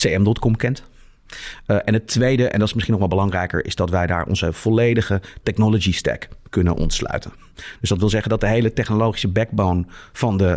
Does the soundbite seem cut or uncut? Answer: uncut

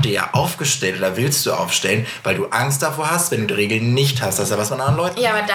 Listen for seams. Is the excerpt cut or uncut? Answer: uncut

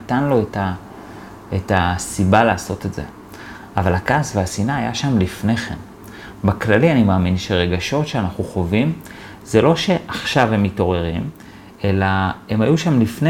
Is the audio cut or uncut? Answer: uncut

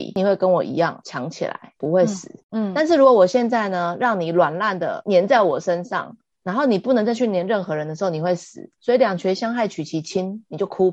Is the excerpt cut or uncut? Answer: uncut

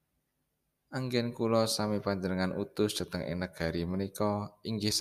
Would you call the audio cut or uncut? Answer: uncut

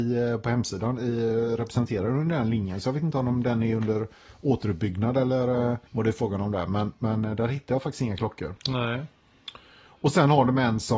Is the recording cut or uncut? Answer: cut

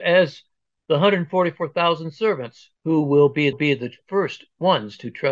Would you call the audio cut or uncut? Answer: cut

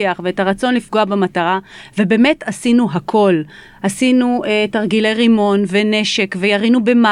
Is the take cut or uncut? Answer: uncut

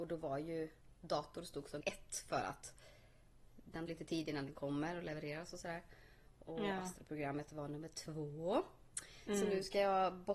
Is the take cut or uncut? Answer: cut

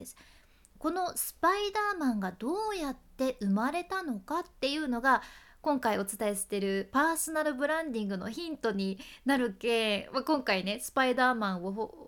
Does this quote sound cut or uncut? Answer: uncut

